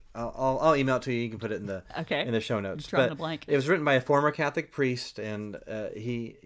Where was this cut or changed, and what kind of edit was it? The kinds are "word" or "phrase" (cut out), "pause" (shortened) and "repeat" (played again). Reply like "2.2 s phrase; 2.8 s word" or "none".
none